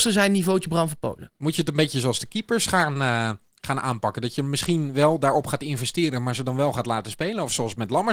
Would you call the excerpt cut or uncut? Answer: uncut